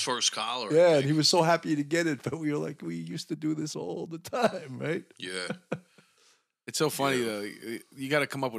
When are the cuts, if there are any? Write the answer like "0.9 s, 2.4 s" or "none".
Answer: none